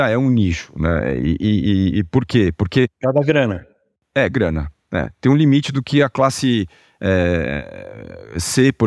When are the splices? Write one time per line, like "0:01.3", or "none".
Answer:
none